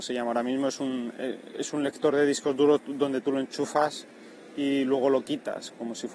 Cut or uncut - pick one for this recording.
uncut